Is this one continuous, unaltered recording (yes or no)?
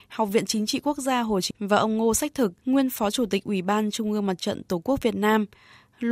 no